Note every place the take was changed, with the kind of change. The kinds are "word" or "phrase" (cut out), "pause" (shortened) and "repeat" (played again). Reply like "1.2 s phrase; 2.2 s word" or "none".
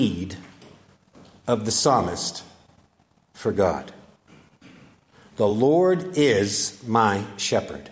none